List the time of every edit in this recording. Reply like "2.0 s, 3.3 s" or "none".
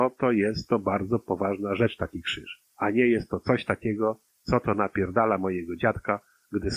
2.7 s, 4.3 s